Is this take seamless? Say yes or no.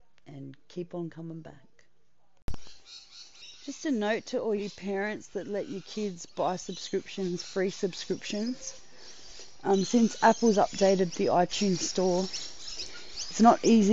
no